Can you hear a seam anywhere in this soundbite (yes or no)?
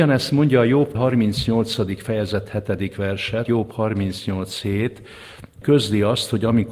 yes